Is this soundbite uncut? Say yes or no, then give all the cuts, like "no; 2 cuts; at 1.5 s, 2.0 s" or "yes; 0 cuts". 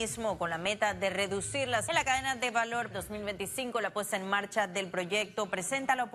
no; 2 cuts; at 1.9 s, 2.9 s